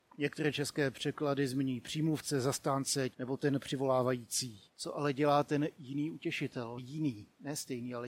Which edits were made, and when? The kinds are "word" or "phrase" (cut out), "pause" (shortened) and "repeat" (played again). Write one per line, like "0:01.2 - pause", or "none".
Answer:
0:03.1 - word
0:04.7 - pause
0:06.8 - word